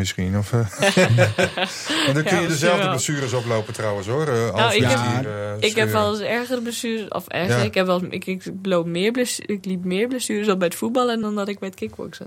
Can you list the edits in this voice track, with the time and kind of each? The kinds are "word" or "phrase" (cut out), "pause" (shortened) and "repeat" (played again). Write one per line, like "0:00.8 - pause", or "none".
none